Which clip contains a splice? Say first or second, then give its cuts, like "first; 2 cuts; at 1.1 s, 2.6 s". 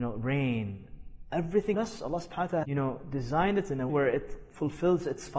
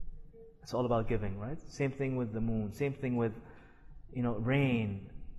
first; 3 cuts; at 1.7 s, 2.6 s, 3.9 s